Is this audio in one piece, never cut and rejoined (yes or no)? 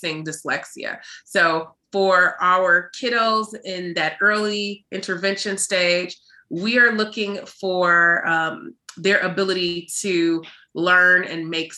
yes